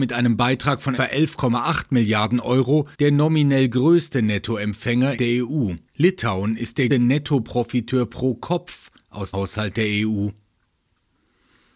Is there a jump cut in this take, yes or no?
yes